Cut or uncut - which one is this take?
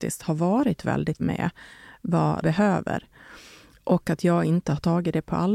cut